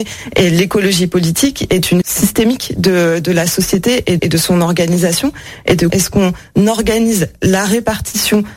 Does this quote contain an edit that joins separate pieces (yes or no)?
yes